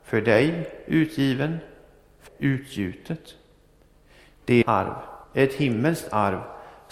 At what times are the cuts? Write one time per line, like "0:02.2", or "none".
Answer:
0:02.3
0:04.6
0:05.2